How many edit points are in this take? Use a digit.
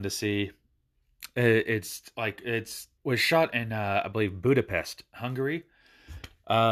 1